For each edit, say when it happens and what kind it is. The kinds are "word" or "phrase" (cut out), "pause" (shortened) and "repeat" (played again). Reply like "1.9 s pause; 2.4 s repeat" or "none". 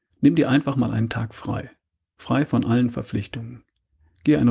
none